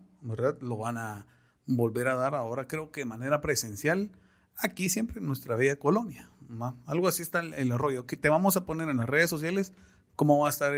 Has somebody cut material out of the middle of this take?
no; 0 cuts

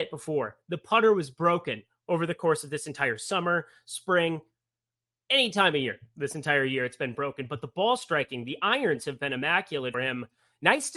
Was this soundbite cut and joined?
yes; 1 cut; at 9.9 s

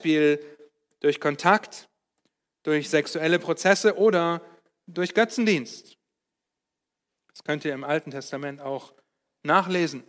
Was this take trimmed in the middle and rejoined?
no; 0 cuts

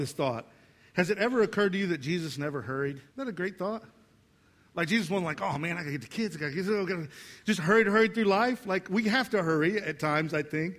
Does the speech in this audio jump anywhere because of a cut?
yes; 1 cut; at 3.1 s

